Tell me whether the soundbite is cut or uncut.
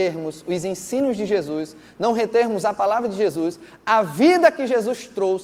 uncut